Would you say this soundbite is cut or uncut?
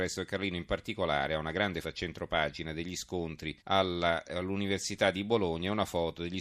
cut